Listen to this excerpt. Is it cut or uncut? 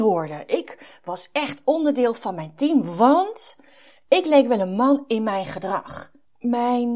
uncut